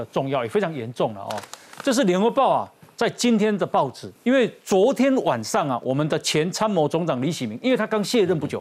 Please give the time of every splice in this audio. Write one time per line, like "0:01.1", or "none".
0:04.2